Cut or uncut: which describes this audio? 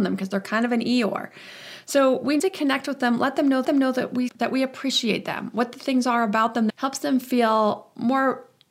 cut